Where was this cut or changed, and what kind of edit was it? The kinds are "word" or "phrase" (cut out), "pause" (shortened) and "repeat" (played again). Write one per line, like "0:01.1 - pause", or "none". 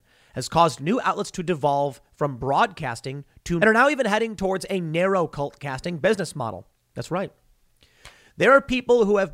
0:03.6 - phrase

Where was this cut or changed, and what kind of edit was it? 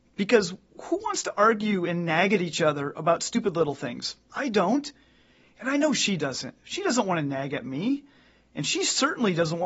none

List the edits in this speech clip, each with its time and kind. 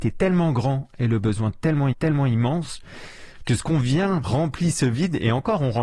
0:01.9 - repeat
0:04.2 - word

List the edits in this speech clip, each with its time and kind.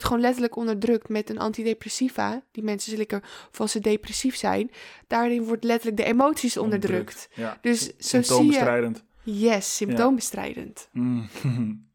none

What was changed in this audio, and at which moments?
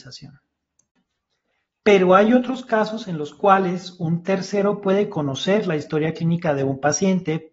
none

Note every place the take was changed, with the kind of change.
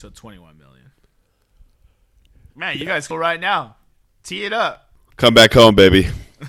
0:02.5 - pause
0:03.1 - phrase

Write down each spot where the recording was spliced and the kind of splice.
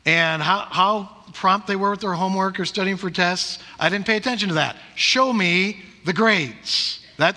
none

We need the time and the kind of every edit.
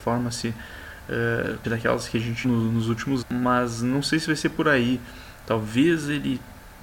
0:01.6 - word
0:02.4 - word
0:03.2 - word

